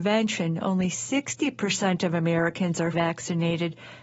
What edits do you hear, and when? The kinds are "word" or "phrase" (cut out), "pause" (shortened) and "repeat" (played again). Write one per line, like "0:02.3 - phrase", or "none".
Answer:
0:02.9 - word